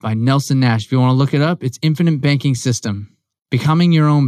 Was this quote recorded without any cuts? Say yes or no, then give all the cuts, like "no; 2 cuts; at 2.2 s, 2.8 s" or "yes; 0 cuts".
yes; 0 cuts